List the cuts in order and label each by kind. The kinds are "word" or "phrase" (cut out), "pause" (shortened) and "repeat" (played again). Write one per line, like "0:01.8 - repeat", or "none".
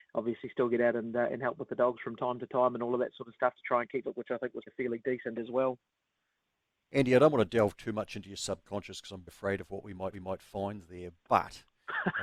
0:03.5 - word
0:04.0 - phrase
0:04.7 - word
0:05.3 - word
0:06.4 - pause
0:09.3 - word
0:10.1 - repeat